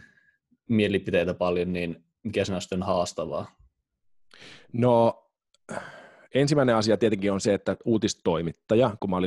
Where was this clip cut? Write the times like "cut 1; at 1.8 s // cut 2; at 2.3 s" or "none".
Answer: none